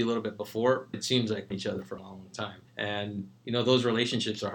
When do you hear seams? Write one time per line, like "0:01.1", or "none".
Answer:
0:00.9
0:01.5
0:02.0
0:02.7